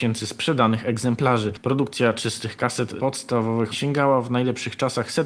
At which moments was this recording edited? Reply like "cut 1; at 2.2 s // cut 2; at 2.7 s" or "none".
cut 1; at 3.0 s // cut 2; at 3.7 s